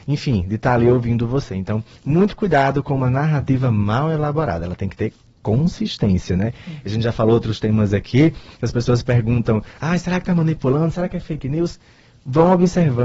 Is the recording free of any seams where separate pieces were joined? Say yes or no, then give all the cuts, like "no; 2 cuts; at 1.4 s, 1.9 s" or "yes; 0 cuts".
yes; 0 cuts